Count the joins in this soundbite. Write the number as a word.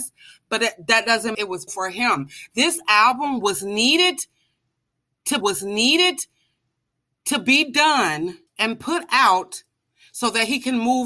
four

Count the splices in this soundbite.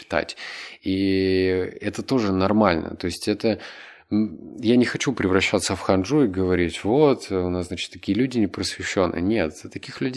zero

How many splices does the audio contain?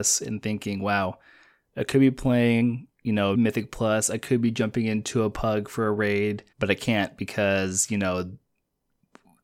three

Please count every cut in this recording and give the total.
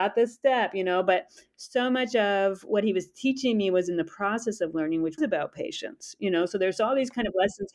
one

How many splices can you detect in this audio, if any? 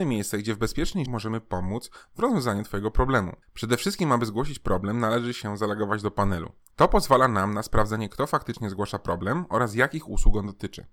three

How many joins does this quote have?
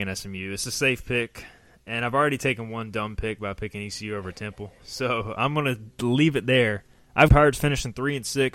one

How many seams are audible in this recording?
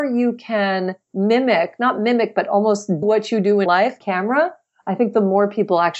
three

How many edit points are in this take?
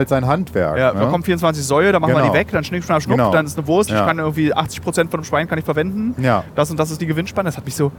one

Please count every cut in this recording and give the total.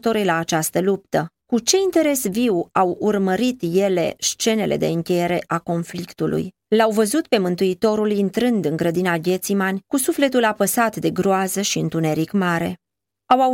two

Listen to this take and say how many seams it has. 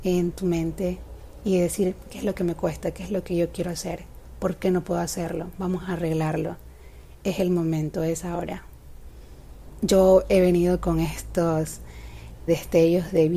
one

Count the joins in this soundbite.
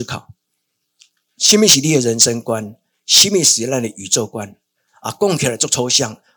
zero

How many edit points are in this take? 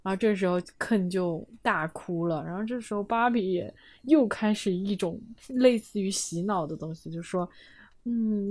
zero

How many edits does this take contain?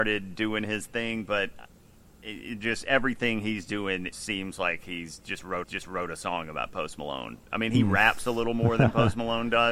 one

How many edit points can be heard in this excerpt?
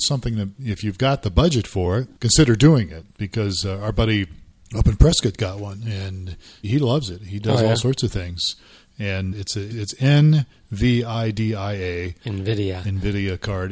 five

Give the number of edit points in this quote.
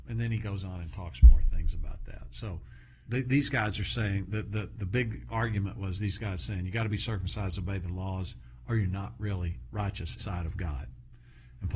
one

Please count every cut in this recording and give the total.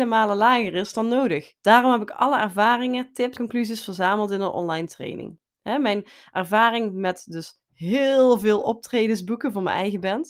two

